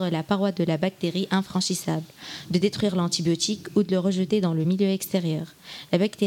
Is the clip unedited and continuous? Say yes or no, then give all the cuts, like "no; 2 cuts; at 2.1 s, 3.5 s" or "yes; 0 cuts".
yes; 0 cuts